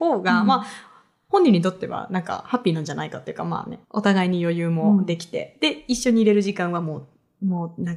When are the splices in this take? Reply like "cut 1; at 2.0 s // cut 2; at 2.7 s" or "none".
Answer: cut 1; at 3.8 s

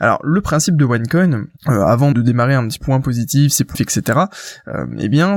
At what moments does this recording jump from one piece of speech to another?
cut 1; at 1.6 s // cut 2; at 2.1 s // cut 3; at 2.8 s // cut 4; at 3.7 s

